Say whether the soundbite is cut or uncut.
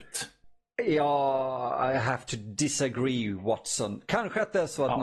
uncut